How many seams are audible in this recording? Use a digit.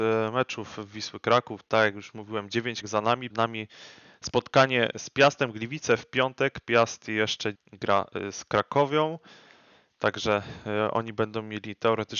3